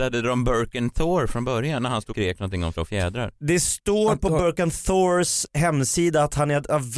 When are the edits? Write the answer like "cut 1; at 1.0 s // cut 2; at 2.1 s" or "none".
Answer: cut 1; at 2.1 s // cut 2; at 2.7 s